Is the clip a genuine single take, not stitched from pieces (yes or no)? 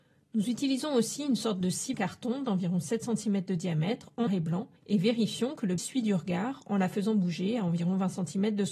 no